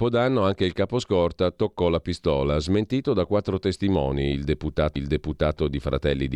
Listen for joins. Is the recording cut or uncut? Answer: cut